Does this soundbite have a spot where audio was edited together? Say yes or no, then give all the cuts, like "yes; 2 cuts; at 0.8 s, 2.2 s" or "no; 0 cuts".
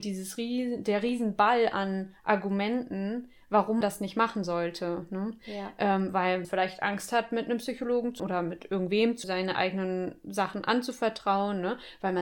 yes; 4 cuts; at 3.8 s, 6.4 s, 8.2 s, 9.2 s